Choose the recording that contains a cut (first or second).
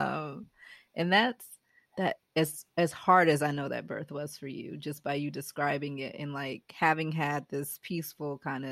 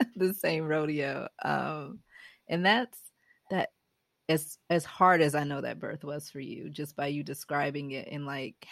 first